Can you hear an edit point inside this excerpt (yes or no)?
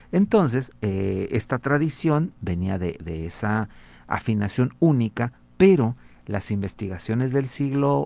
no